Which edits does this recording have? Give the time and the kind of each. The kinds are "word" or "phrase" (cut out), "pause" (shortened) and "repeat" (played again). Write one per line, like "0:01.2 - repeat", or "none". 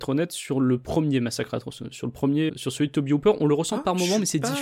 0:02.5 - word